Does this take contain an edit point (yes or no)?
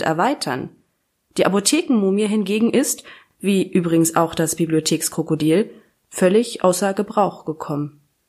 no